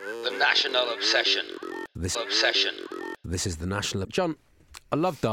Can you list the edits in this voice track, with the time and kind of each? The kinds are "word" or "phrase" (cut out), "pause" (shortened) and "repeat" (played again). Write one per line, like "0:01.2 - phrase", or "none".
0:02.1 - repeat
0:04.0 - word